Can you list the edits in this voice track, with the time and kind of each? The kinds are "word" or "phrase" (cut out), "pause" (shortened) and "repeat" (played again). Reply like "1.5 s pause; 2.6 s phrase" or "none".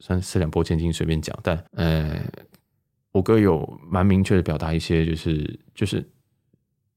1.7 s pause